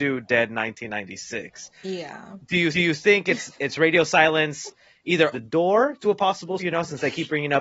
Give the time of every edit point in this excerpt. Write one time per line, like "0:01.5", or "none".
0:02.7
0:05.3
0:06.6